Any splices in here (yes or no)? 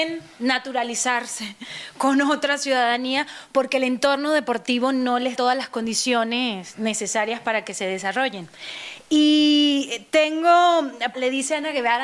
yes